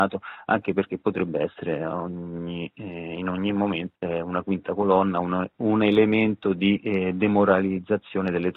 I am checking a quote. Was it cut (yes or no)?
yes